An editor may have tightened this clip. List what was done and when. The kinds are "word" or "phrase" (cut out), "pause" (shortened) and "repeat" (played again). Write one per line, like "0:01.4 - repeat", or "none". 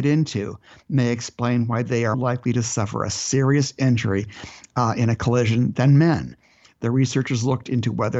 0:02.1 - word